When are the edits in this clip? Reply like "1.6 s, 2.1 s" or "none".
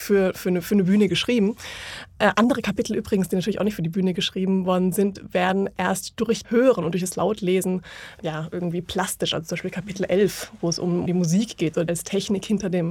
6.4 s, 8.2 s, 11.1 s, 11.9 s